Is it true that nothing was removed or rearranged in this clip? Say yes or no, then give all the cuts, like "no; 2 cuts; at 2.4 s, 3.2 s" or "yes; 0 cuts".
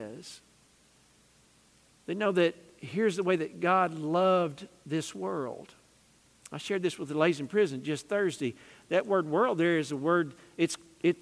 no; 1 cut; at 5.9 s